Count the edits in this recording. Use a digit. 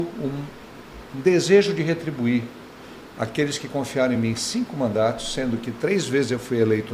0